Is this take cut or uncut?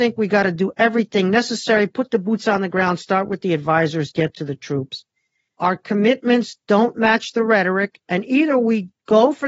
uncut